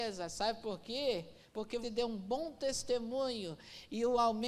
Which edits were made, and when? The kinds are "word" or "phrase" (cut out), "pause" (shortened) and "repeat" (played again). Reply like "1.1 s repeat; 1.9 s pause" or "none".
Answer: 1.8 s word